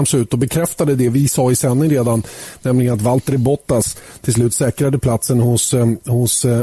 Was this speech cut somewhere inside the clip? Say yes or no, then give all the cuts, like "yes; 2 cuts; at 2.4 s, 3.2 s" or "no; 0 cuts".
no; 0 cuts